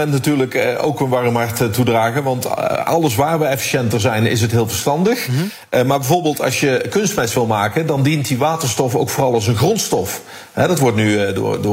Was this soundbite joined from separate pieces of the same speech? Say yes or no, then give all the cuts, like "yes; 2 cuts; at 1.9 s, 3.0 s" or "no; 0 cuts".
no; 0 cuts